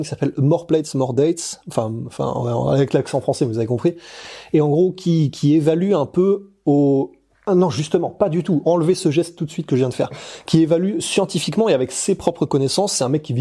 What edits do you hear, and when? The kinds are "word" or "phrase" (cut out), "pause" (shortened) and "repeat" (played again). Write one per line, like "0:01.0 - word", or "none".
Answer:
none